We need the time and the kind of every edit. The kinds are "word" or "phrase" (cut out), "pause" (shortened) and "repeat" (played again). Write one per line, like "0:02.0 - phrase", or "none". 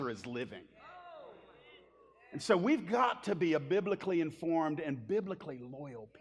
none